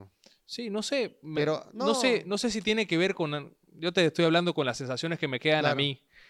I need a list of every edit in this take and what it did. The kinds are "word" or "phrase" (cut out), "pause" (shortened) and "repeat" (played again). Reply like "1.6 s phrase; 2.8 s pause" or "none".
none